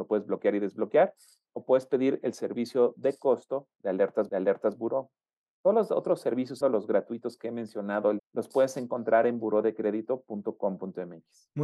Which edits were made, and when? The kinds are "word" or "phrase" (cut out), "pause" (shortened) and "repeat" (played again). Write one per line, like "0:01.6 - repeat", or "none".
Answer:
0:03.7 - pause
0:04.3 - repeat
0:06.6 - word
0:08.2 - phrase